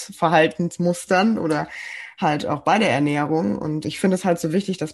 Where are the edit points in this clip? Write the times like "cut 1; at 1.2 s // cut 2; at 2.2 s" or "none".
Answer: cut 1; at 3.8 s